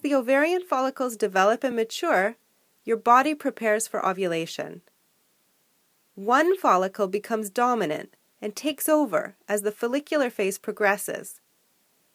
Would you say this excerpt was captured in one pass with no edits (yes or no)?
yes